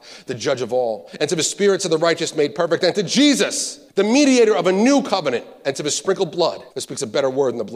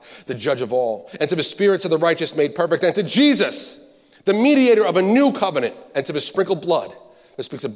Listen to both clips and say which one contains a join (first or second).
first